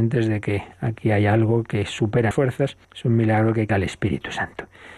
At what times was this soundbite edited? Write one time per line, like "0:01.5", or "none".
0:02.3
0:02.8
0:03.7